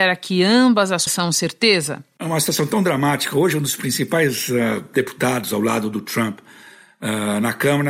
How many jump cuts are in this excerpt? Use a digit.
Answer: 1